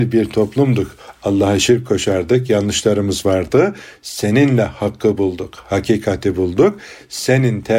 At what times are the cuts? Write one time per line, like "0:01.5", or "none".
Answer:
none